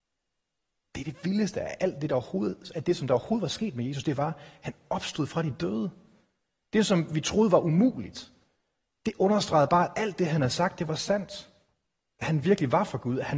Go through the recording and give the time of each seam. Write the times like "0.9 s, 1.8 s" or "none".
none

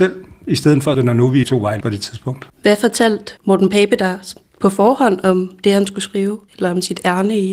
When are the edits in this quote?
0.9 s, 1.4 s, 1.8 s, 3.4 s

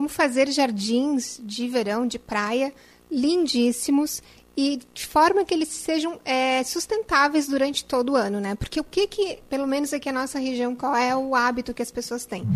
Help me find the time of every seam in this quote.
none

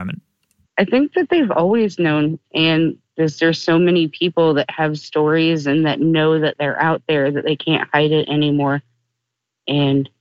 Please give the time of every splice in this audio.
none

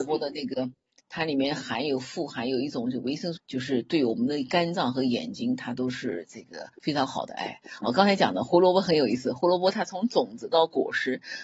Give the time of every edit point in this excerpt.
3.4 s, 6.7 s

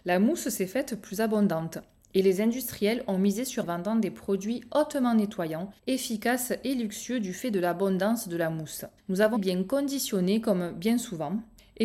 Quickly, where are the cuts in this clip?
3.6 s, 5.8 s, 9.0 s, 9.4 s

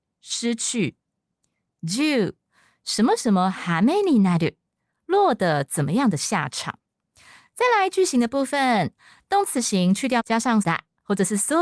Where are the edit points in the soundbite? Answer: 9.5 s, 10.2 s, 10.6 s

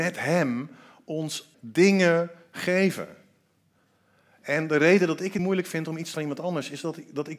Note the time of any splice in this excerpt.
1.5 s, 5.4 s, 6.1 s

